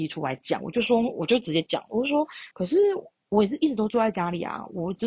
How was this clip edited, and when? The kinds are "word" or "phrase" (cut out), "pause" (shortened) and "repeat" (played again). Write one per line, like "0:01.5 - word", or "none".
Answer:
0:02.5 - pause
0:03.2 - pause